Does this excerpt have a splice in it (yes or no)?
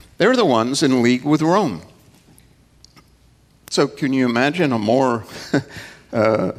no